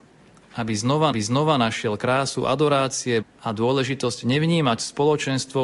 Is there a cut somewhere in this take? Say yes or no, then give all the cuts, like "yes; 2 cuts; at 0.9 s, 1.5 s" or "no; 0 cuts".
yes; 2 cuts; at 1.1 s, 3.2 s